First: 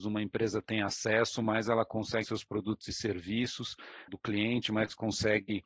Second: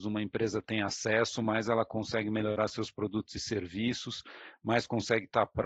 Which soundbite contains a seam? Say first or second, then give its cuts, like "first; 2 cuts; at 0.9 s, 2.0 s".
first; 2 cuts; at 2.2 s, 4.1 s